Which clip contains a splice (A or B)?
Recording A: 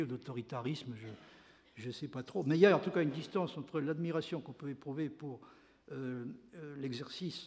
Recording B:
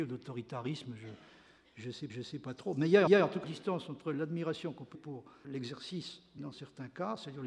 B